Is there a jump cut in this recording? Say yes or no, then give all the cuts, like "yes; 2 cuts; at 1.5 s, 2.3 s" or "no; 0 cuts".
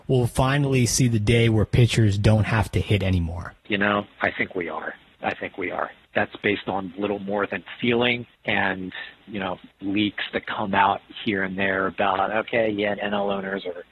yes; 4 cuts; at 3.6 s, 8.3 s, 9.7 s, 13.0 s